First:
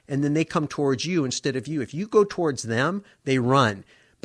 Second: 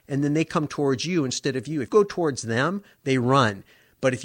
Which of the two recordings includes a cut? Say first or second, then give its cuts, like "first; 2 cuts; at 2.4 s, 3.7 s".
second; 1 cut; at 1.9 s